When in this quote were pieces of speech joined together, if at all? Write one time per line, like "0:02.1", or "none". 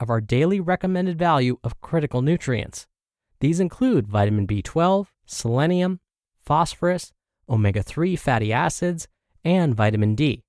0:05.1